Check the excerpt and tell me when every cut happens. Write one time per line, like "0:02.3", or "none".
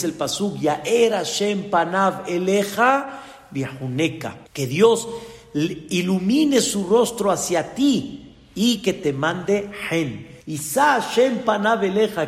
0:04.5
0:10.4